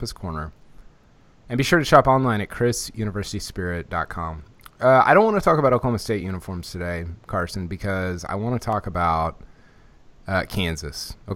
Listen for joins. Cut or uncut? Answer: uncut